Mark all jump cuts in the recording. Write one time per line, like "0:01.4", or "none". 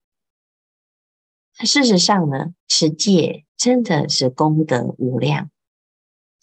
0:02.6
0:03.5